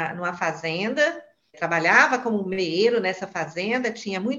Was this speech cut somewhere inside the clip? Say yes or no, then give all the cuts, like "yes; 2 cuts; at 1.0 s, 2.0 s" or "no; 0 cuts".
yes; 1 cut; at 1.5 s